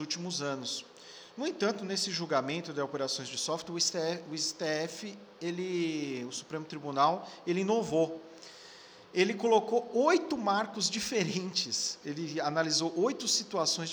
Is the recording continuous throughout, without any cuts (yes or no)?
yes